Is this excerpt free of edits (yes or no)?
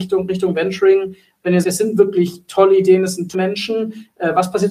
no